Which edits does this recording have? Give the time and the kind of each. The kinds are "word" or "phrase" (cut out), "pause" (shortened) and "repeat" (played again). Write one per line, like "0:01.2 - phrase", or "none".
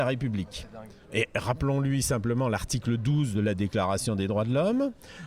0:01.0 - pause